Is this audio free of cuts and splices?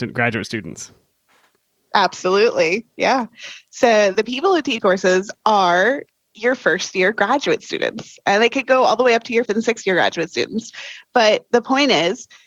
no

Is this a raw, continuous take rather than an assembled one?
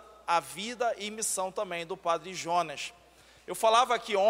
yes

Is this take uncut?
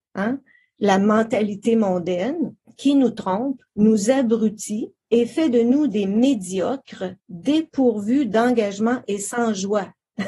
no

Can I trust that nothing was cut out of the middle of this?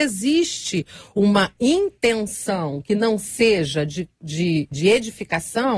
yes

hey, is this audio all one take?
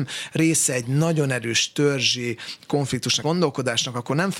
no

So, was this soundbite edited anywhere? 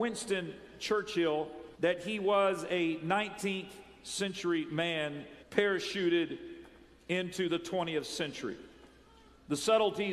yes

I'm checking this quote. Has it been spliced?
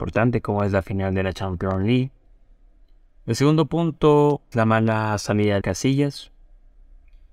yes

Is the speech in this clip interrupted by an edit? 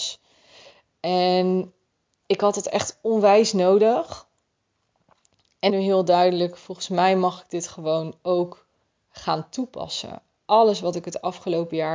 yes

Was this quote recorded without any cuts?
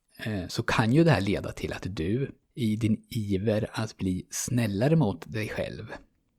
no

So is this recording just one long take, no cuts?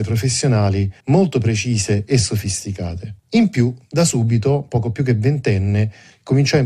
no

